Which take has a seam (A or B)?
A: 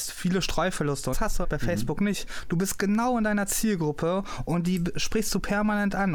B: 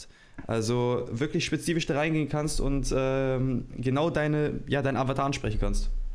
A